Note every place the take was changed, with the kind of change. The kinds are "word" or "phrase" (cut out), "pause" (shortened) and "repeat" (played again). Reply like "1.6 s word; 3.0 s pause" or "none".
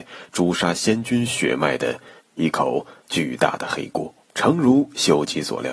2.2 s pause; 3.0 s pause; 4.2 s pause